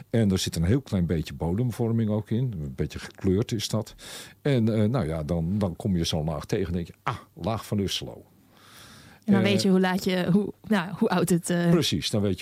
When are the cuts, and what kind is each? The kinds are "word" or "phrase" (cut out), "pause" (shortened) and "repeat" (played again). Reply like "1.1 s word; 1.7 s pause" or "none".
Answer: none